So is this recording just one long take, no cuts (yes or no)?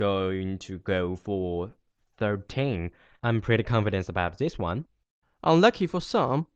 yes